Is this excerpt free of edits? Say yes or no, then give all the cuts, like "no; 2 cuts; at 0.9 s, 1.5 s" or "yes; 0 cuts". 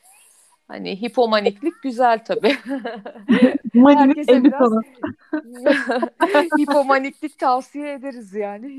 yes; 0 cuts